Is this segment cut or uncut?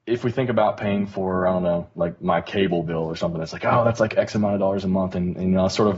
uncut